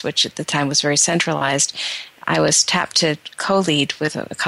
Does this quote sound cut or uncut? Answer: uncut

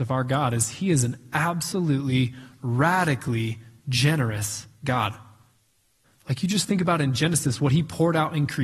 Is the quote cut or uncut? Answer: uncut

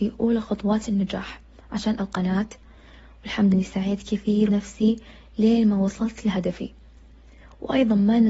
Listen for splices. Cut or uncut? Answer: cut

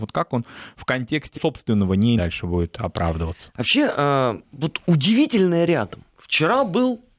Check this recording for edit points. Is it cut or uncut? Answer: cut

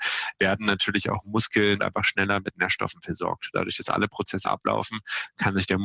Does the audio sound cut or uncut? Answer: cut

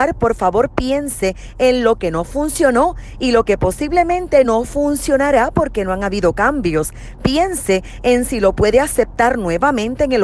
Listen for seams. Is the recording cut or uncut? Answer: uncut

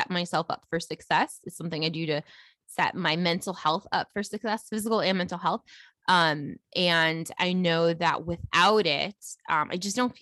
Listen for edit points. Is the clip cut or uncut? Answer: uncut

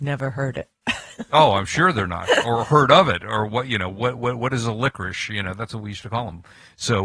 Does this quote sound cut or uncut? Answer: uncut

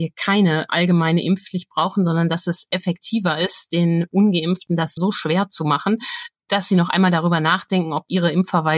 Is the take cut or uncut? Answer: cut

